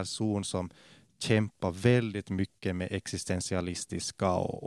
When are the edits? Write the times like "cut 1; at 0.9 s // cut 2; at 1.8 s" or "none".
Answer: none